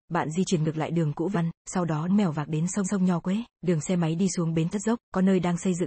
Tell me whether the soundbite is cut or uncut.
cut